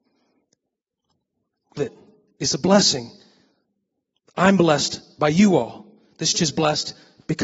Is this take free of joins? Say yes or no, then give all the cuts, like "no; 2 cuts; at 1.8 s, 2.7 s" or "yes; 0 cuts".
no; 2 cuts; at 1.8 s, 6.3 s